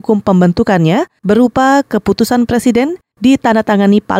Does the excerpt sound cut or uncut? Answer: uncut